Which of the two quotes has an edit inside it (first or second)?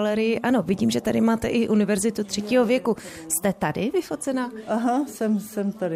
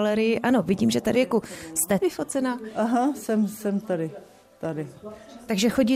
second